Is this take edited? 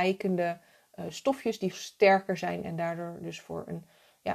yes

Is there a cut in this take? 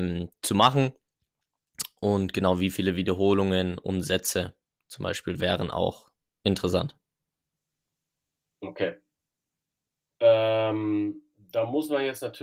no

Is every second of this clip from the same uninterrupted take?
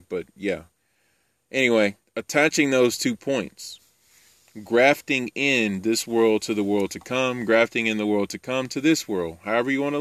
no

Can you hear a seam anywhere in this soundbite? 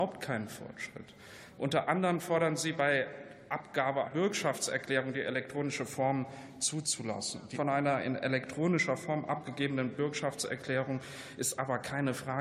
yes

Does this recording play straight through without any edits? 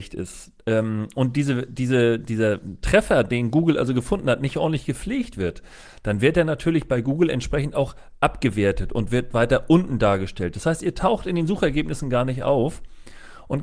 yes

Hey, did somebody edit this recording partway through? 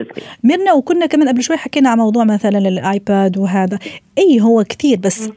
no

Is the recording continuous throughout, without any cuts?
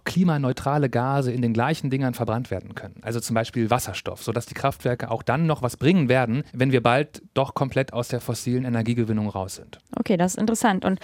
no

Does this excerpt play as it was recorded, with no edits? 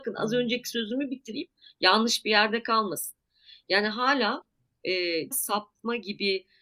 no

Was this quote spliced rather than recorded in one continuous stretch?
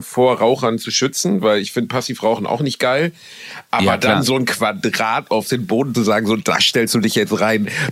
yes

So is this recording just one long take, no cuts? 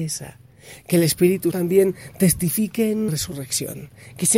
no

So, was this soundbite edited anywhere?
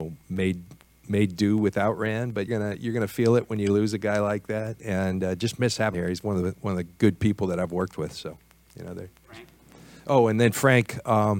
yes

